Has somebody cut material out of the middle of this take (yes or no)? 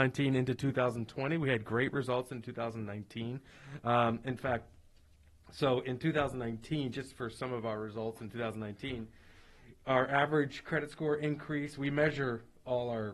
no